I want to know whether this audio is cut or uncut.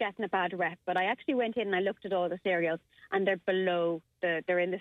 uncut